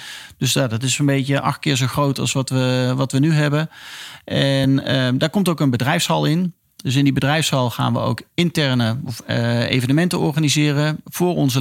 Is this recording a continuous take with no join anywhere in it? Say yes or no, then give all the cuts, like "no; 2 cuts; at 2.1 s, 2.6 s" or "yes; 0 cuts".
yes; 0 cuts